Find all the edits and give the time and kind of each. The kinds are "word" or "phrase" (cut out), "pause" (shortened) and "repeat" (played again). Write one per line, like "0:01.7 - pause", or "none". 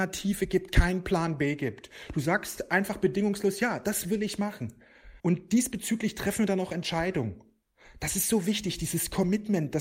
0:05.2 - pause